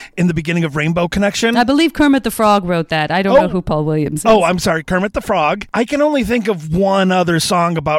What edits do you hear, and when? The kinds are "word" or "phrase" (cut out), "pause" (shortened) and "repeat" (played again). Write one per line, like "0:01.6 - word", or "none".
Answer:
none